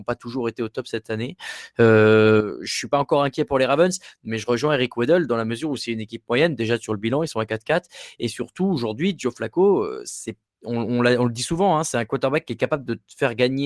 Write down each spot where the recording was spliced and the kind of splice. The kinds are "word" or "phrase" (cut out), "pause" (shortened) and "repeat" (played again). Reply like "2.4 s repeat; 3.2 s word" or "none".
none